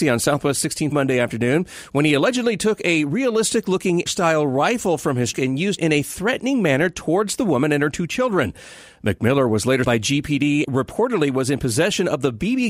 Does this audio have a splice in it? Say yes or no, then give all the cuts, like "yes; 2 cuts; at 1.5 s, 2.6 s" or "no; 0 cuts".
yes; 6 cuts; at 0.9 s, 4.1 s, 5.3 s, 5.8 s, 9.8 s, 10.6 s